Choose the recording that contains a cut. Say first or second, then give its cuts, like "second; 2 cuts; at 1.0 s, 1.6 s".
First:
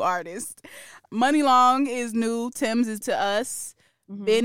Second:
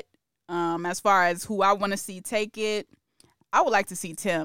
first; 1 cut; at 3.0 s